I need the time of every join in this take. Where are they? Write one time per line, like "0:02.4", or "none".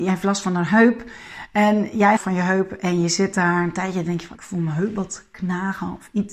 0:02.2
0:04.3